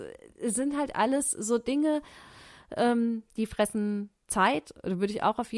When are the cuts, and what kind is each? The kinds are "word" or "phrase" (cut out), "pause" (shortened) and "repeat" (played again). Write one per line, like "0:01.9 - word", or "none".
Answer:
none